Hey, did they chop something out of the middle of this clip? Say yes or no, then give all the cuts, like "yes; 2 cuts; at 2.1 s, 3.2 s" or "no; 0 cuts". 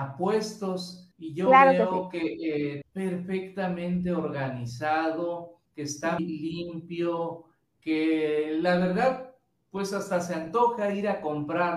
yes; 4 cuts; at 1.1 s, 2.8 s, 5.7 s, 6.2 s